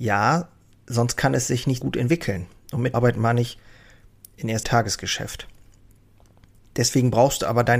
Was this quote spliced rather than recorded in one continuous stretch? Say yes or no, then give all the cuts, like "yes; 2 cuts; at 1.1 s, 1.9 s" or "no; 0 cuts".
yes; 3 cuts; at 1.8 s, 2.9 s, 4.6 s